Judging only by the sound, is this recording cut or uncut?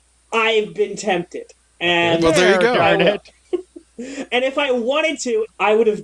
uncut